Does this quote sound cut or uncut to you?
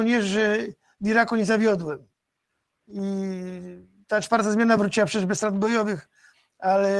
uncut